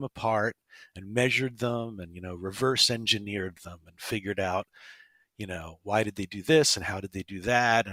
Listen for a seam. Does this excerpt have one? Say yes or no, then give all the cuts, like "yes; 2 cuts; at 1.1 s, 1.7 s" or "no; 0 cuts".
no; 0 cuts